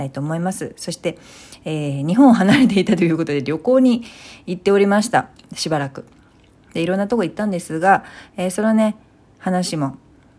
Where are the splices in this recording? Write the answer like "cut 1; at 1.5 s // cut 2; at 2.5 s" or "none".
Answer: none